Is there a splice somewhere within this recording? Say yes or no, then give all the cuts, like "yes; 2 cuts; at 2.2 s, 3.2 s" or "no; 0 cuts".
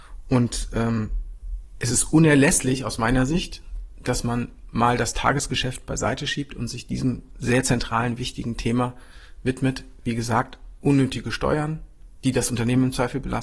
no; 0 cuts